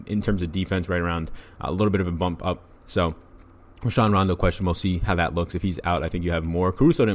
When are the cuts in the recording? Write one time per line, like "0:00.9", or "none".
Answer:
none